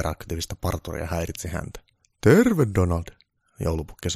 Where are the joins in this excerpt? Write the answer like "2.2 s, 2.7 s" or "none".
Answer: 2.0 s

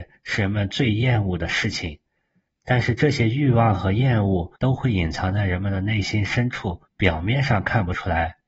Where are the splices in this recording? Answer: 4.6 s, 6.9 s

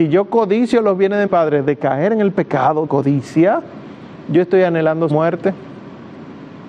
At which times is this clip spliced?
1.3 s, 2.9 s, 5.1 s

